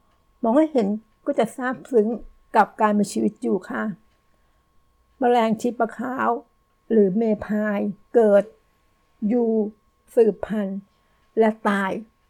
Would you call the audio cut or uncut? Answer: cut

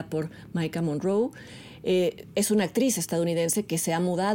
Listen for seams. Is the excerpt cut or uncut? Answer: uncut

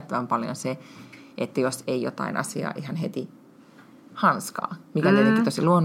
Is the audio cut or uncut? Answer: uncut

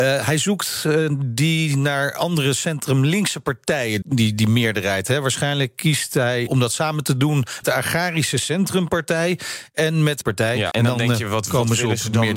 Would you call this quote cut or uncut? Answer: cut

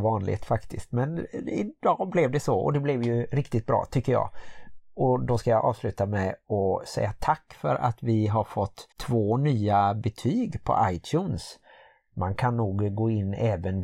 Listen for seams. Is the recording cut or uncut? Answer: cut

